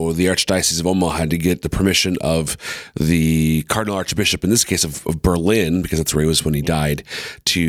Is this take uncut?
yes; 0 cuts

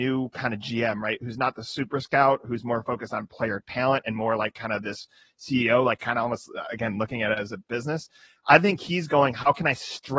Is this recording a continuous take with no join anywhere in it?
yes; 0 cuts

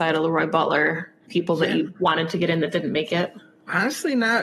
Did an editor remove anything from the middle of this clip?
no; 0 cuts

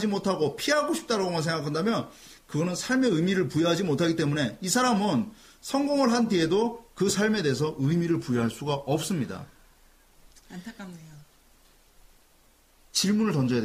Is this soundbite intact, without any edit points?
yes; 0 cuts

